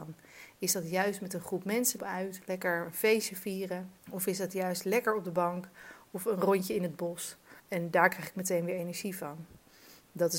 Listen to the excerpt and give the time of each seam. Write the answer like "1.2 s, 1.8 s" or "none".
2.0 s, 4.0 s, 7.6 s

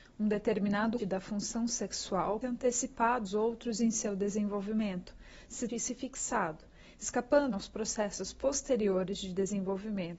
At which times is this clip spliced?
1.0 s, 2.4 s, 3.3 s, 5.7 s, 7.5 s

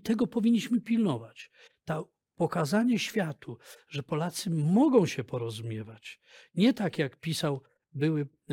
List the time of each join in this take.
none

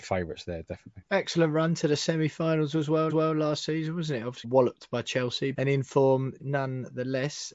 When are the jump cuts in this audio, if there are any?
1.1 s, 3.1 s, 4.4 s, 5.5 s, 6.4 s

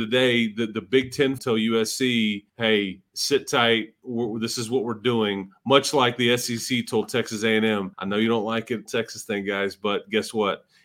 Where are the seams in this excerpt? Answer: 1.4 s, 2.5 s, 7.9 s, 8.9 s

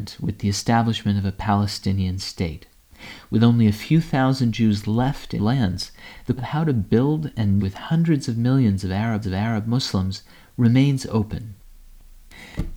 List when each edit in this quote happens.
5.4 s, 6.4 s, 7.6 s, 9.2 s

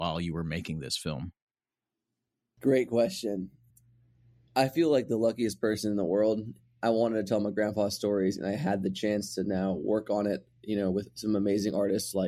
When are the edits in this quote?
none

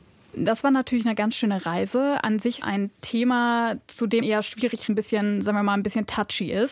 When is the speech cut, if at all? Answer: 2.6 s, 4.2 s, 4.9 s

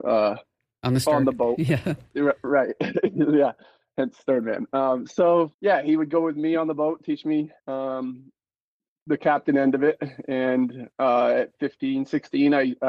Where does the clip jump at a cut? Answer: 5.5 s, 7.6 s, 10.9 s

